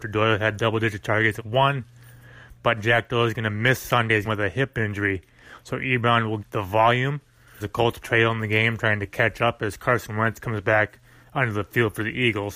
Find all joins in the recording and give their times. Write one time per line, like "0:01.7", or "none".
0:01.4
0:02.8
0:04.2
0:06.4
0:07.6
0:08.0